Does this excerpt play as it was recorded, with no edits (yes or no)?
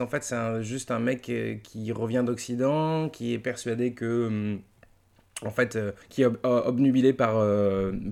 no